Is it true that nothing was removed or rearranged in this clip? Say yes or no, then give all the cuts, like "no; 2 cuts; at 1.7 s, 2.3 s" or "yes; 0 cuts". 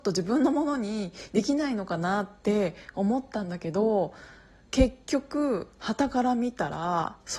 yes; 0 cuts